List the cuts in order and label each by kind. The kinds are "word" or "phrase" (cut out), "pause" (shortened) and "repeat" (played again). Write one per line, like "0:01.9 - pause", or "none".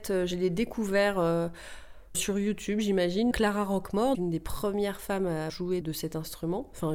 0:02.1 - word
0:03.3 - word
0:04.1 - word
0:05.5 - word
0:05.8 - word